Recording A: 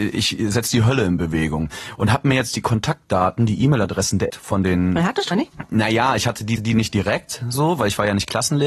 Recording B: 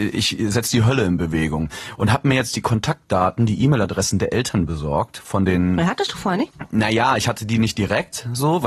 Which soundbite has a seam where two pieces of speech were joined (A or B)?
A